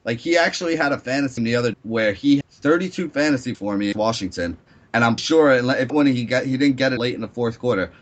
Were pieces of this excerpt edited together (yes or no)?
yes